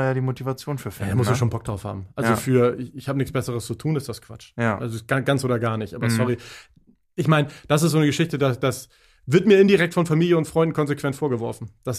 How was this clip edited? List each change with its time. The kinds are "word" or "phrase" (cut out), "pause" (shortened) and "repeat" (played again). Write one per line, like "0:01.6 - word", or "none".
none